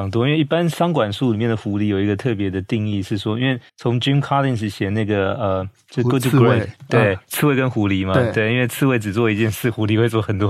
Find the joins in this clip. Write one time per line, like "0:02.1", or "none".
0:03.7